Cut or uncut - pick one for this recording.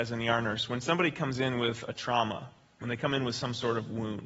uncut